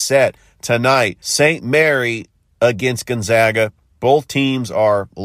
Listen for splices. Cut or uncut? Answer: uncut